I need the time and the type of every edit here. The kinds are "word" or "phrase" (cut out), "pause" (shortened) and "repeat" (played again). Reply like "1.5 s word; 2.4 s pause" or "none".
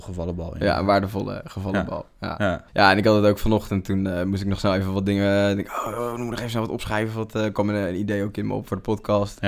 2.7 s pause